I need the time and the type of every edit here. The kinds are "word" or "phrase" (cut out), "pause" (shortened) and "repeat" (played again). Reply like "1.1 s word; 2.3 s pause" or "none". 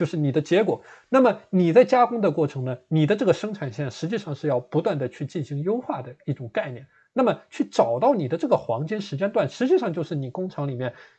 none